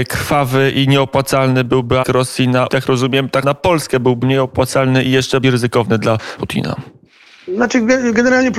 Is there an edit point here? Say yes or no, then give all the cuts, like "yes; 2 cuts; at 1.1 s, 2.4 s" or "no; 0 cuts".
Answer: yes; 6 cuts; at 2.0 s, 2.7 s, 3.4 s, 4.2 s, 5.4 s, 6.4 s